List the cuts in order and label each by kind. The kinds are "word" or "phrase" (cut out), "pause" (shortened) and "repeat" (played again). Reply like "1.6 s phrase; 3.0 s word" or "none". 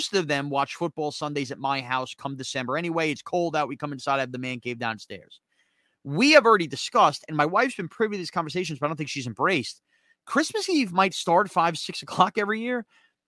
none